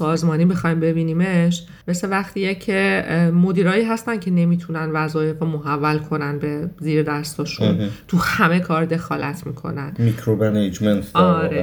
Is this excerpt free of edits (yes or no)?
no